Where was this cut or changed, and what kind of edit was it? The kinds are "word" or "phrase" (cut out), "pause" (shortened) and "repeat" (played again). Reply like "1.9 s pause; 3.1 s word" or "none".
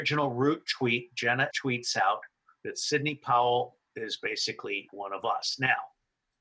1.5 s word; 2.5 s pause; 3.9 s pause; 4.9 s word